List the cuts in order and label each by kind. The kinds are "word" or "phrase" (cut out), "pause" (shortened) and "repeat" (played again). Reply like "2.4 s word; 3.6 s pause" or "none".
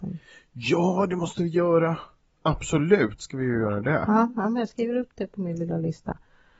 none